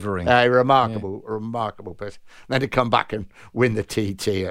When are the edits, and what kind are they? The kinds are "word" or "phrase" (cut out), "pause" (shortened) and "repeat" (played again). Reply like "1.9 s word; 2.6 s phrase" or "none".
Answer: none